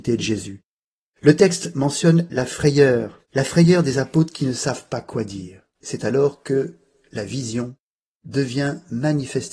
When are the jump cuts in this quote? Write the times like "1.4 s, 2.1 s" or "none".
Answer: none